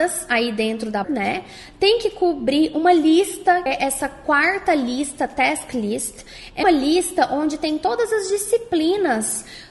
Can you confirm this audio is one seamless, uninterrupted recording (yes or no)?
no